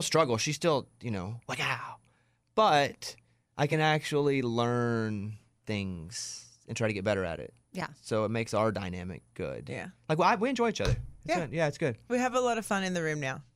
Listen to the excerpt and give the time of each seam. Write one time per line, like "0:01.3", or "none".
none